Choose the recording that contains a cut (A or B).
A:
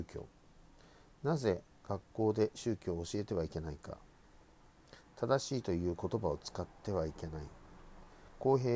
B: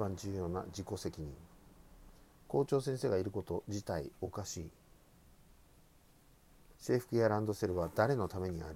B